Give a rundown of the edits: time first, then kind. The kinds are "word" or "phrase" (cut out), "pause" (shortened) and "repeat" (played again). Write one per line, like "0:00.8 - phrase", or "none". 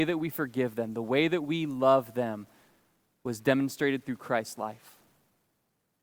none